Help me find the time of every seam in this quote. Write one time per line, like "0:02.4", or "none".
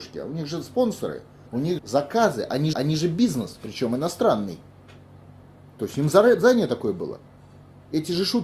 0:01.5
0:01.8
0:02.7

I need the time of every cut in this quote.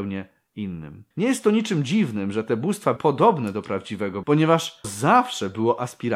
0:01.1
0:03.0
0:04.2
0:04.8

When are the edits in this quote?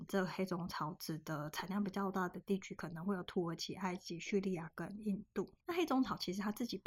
0:05.6

